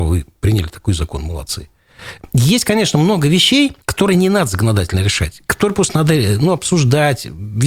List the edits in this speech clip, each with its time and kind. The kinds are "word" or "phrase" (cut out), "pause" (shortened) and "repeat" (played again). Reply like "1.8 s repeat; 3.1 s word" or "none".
3.8 s pause